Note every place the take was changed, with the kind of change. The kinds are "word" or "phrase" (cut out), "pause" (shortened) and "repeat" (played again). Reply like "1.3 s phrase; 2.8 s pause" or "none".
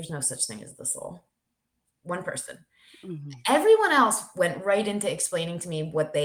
none